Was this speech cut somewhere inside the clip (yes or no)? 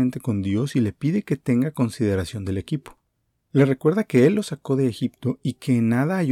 no